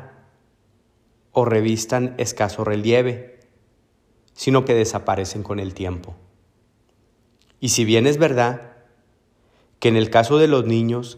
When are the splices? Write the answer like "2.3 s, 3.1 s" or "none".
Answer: 4.7 s